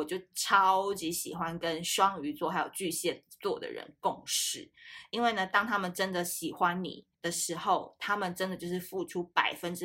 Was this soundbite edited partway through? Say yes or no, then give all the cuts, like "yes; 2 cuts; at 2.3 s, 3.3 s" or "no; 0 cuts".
yes; 1 cut; at 7.1 s